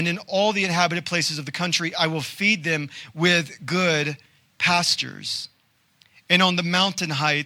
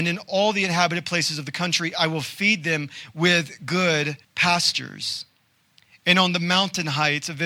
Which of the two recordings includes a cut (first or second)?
second